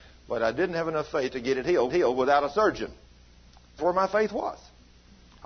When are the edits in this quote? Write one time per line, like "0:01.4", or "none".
0:01.9
0:03.8